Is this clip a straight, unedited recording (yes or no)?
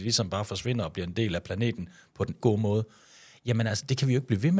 no